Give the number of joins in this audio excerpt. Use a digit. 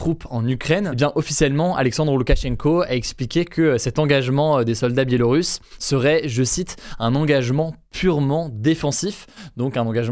0